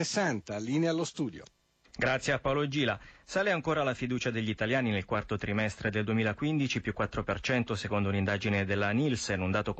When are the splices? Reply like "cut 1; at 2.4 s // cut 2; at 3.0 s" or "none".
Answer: none